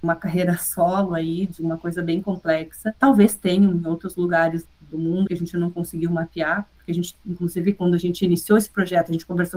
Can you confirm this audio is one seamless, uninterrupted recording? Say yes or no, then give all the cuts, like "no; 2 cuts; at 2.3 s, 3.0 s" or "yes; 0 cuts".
no; 2 cuts; at 3.0 s, 5.3 s